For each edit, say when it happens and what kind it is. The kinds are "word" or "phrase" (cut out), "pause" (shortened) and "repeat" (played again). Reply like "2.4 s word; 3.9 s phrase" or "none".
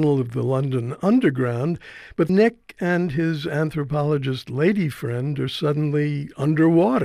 2.3 s word

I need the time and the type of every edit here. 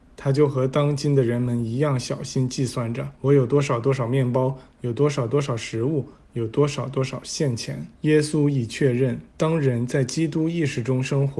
3.2 s pause; 7.9 s pause; 9.3 s pause

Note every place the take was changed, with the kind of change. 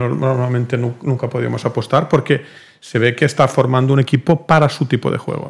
none

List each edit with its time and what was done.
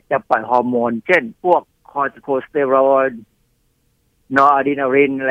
1.4 s pause

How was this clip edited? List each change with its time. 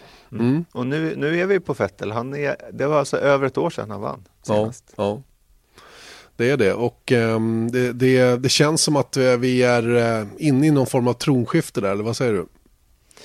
none

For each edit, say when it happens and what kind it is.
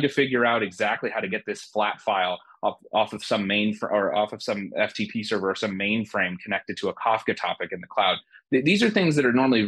none

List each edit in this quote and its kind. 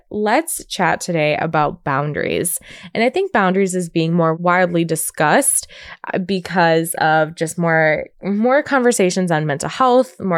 8.1 s pause

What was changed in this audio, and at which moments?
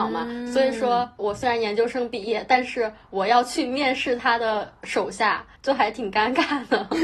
1.2 s word

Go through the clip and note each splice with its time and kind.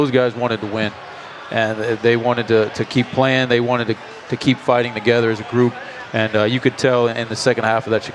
2.0 s word

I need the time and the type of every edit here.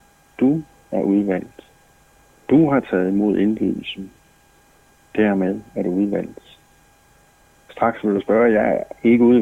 none

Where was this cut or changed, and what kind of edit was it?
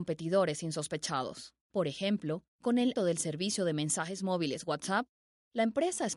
1.6 s pause; 2.5 s pause; 3.0 s word

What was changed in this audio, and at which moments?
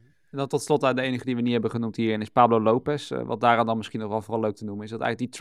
none

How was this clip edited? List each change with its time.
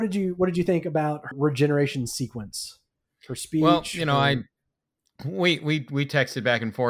1.3 s word

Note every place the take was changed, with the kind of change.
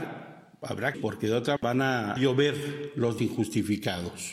0.9 s phrase; 1.6 s word; 2.2 s word; 3.2 s word

